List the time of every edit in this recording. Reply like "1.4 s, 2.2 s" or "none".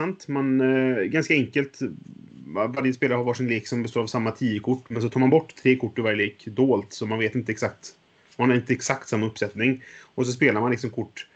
none